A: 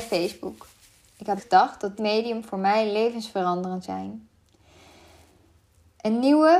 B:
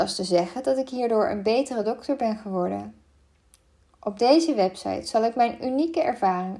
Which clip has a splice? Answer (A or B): A